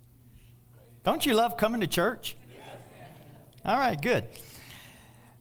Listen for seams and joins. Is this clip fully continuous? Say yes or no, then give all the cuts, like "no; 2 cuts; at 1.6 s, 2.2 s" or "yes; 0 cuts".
yes; 0 cuts